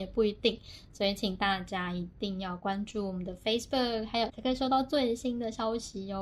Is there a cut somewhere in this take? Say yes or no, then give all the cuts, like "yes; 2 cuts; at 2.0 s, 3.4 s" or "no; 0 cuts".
yes; 1 cut; at 4.3 s